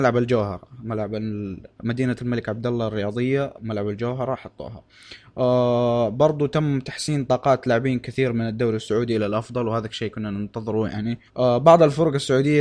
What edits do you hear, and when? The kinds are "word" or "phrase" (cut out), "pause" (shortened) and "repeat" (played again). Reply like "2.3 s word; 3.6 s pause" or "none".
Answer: 11.3 s pause